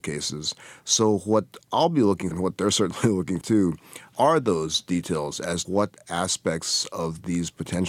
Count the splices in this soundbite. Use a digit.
4